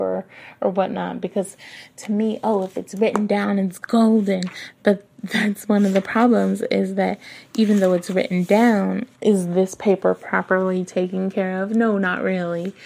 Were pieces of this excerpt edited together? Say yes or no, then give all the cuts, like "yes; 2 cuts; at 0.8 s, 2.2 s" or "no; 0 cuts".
yes; 1 cut; at 9.1 s